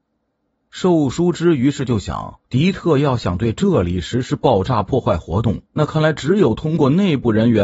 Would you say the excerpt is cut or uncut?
cut